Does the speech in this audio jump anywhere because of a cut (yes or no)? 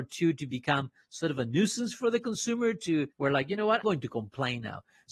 yes